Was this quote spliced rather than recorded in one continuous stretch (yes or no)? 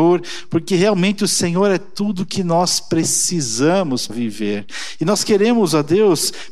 yes